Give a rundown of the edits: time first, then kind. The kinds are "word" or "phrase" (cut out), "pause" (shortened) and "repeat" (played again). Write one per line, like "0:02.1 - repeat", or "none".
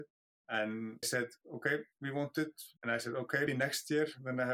0:01.0 - word
0:01.9 - pause
0:02.8 - pause
0:03.5 - word